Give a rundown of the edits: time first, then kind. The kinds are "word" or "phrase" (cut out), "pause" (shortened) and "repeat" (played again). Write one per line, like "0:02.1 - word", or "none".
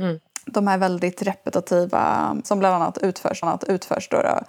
0:02.4 - word
0:03.4 - repeat